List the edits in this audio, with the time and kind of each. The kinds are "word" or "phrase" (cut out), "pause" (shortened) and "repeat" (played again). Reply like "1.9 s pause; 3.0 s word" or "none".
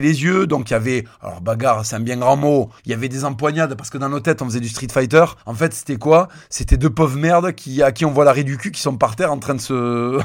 2.8 s pause; 5.4 s pause